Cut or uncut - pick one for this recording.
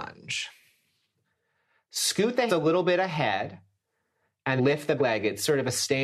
cut